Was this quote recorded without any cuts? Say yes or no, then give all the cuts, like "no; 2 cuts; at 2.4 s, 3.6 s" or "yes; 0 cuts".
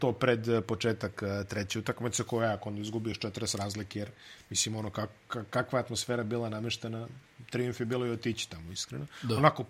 yes; 0 cuts